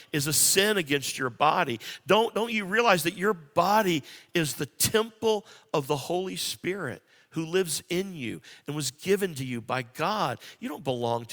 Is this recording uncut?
yes; 0 cuts

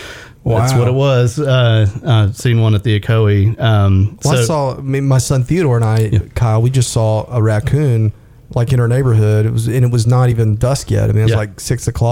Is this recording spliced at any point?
no; 0 cuts

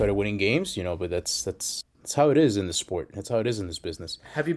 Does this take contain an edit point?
no; 0 cuts

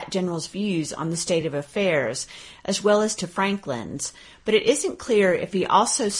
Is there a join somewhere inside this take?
no; 0 cuts

